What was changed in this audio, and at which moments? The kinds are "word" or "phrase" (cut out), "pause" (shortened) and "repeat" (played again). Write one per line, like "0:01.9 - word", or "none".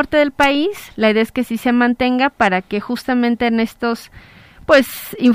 none